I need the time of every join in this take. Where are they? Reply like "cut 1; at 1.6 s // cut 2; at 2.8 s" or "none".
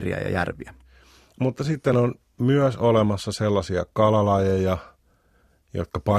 none